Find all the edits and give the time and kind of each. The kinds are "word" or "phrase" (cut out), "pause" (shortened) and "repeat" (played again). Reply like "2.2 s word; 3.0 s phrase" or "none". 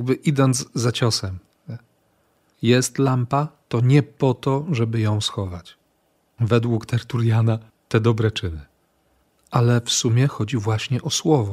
none